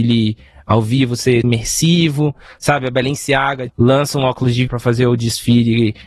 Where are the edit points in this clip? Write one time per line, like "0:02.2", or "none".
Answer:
0:01.4
0:03.7
0:04.7